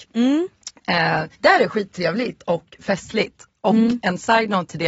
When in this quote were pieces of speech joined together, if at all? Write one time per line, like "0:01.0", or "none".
0:01.3